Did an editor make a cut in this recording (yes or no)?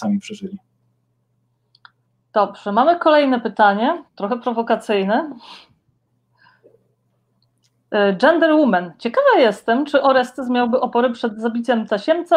yes